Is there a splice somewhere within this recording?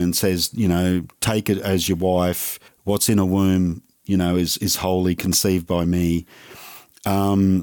yes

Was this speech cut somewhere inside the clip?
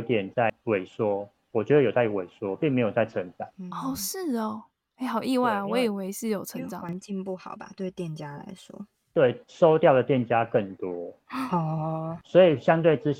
no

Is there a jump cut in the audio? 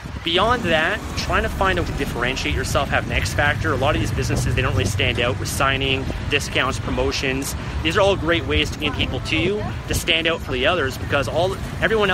yes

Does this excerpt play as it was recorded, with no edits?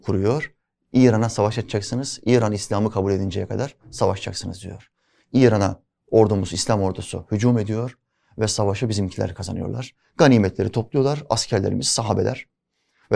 yes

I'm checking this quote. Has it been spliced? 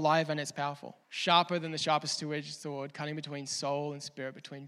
yes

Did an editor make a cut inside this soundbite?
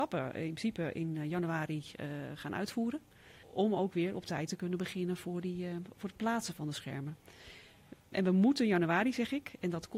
no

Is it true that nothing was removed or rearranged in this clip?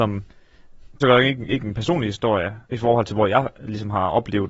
no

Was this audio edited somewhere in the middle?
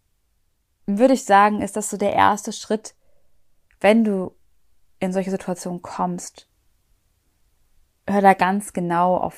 no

